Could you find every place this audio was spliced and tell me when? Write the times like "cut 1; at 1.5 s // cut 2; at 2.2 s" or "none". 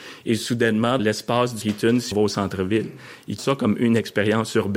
cut 1; at 1.0 s // cut 2; at 1.6 s // cut 3; at 2.1 s // cut 4; at 3.4 s